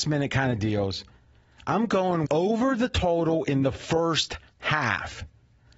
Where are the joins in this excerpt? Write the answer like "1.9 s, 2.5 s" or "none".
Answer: 2.3 s